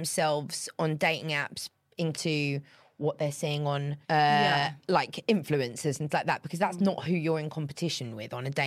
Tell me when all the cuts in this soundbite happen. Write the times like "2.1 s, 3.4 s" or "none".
2.1 s, 4.0 s, 6.1 s